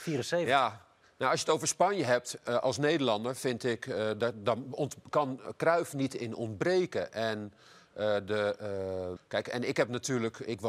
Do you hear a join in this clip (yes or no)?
yes